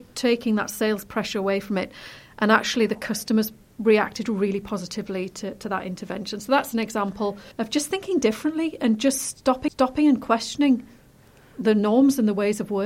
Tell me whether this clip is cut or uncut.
cut